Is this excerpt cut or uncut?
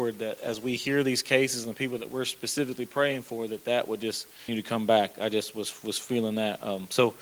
cut